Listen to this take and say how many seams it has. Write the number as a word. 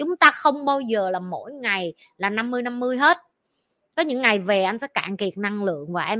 zero